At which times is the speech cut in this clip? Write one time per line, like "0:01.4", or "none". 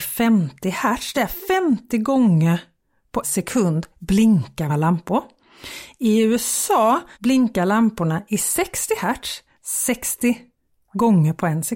0:01.1
0:03.2
0:04.7
0:07.1
0:09.6